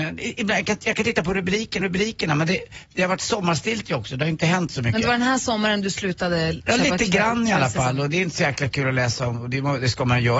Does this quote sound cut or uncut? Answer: cut